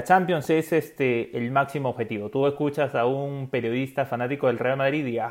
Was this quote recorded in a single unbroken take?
yes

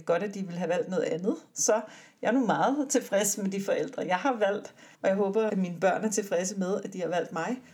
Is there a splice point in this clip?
yes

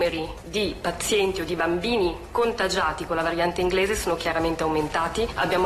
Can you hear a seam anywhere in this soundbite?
no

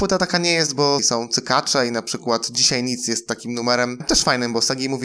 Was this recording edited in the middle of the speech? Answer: yes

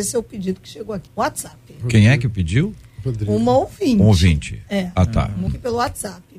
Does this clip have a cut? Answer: yes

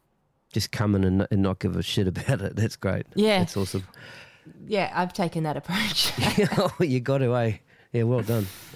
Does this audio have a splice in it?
no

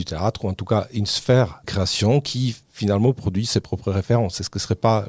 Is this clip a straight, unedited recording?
no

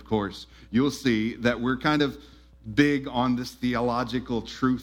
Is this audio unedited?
yes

